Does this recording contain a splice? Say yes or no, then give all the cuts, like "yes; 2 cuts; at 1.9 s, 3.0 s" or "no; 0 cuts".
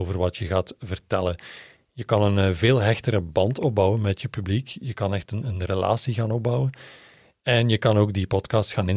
no; 0 cuts